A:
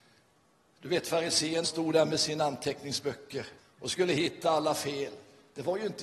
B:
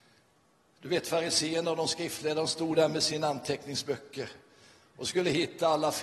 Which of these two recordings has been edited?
A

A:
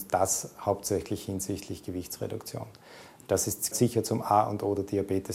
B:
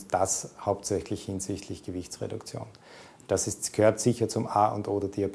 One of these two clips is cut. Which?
A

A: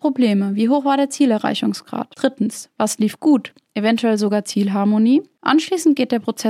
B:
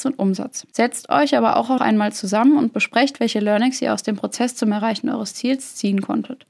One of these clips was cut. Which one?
B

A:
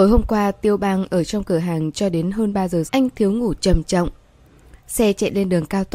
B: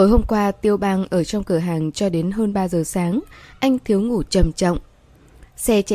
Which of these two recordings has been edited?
A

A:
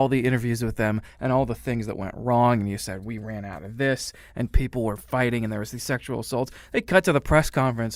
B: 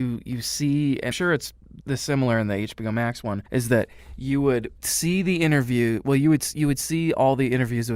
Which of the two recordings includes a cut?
B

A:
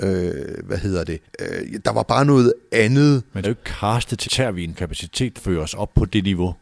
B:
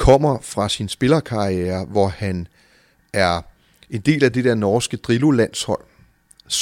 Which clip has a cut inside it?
A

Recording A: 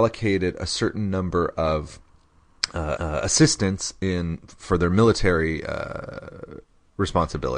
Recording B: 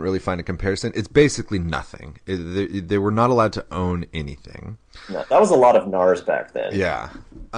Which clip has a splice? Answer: A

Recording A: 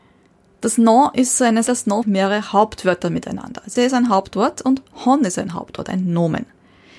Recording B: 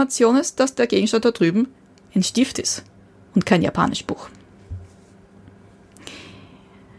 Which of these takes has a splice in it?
A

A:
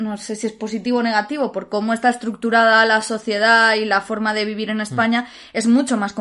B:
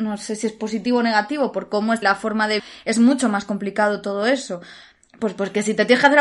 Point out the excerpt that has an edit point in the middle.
B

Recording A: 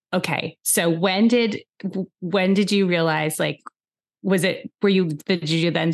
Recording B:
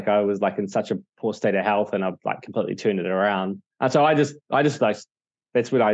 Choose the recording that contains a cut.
B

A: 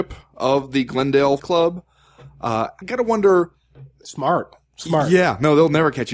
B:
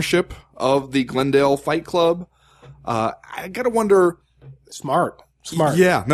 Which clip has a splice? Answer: A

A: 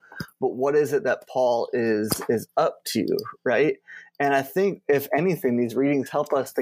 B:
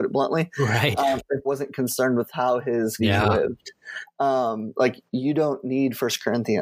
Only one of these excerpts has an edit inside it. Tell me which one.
B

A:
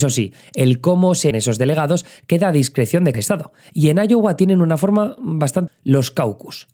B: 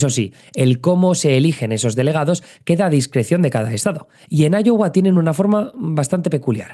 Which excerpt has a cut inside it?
A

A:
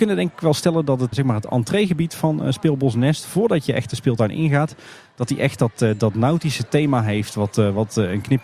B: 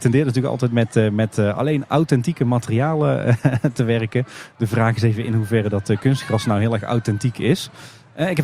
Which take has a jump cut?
A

